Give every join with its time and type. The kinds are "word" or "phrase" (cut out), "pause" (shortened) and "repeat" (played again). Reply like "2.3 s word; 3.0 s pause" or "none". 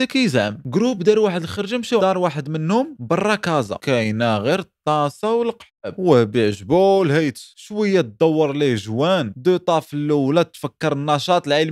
2.0 s word